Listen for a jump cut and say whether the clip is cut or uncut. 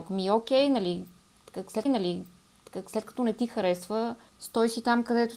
cut